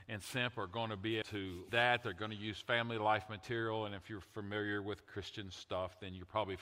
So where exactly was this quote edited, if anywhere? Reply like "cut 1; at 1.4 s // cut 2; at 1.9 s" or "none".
cut 1; at 1.2 s // cut 2; at 1.7 s